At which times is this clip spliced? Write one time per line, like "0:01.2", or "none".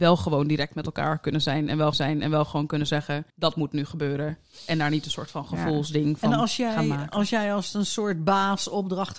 0:01.9
0:03.3